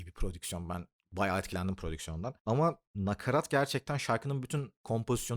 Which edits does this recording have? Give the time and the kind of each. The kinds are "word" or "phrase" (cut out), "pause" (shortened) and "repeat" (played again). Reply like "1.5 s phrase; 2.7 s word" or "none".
2.4 s pause